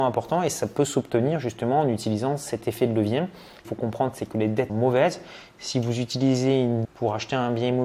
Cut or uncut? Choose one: cut